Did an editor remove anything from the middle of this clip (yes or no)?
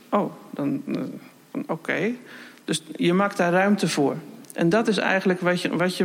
no